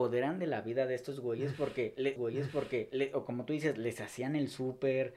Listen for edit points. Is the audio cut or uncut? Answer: cut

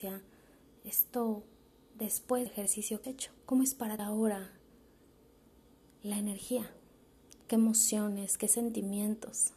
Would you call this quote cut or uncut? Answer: cut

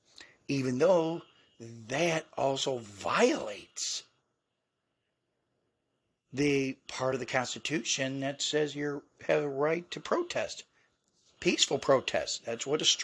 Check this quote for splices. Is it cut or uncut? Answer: uncut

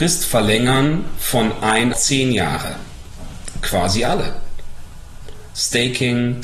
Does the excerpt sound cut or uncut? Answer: cut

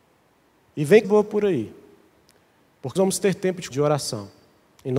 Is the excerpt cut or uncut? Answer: cut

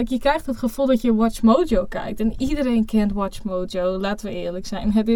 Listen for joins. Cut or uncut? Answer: uncut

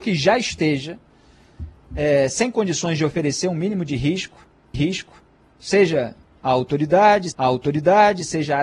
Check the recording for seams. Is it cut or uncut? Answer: cut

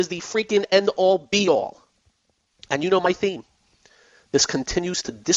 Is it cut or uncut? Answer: uncut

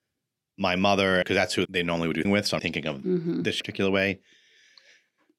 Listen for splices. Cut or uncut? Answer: cut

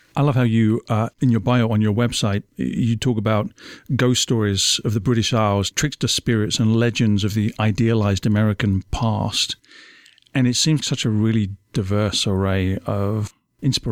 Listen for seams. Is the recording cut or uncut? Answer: cut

